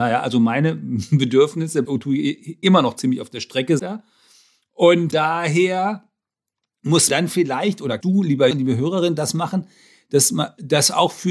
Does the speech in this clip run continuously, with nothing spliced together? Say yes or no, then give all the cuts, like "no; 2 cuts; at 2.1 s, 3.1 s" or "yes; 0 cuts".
no; 7 cuts; at 1.8 s, 2.6 s, 3.8 s, 5.1 s, 7.1 s, 8.0 s, 8.5 s